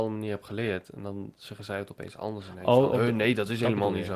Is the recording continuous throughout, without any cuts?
yes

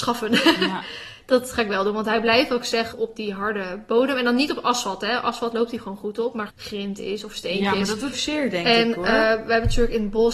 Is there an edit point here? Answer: yes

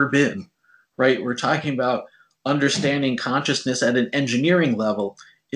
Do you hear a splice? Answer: no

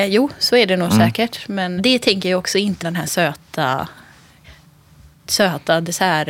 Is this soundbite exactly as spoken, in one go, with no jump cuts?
no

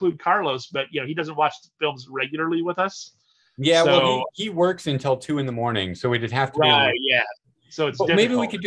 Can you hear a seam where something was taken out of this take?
no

